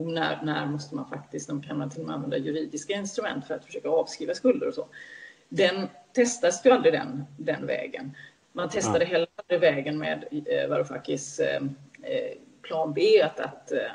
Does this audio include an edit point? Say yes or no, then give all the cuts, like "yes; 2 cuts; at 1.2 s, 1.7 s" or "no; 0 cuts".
no; 0 cuts